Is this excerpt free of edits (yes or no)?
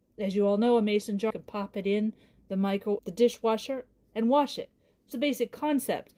no